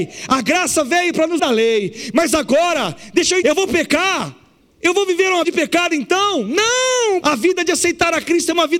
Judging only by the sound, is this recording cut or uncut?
cut